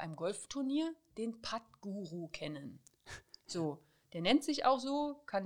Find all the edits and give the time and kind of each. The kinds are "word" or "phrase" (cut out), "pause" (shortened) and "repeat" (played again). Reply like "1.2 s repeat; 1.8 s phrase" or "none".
none